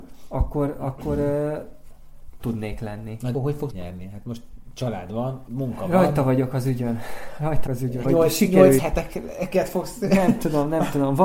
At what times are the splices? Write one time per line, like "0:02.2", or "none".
0:02.4
0:03.3
0:03.7
0:05.5
0:07.7
0:08.0
0:08.8